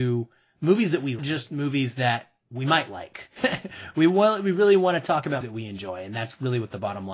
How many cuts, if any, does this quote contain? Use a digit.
2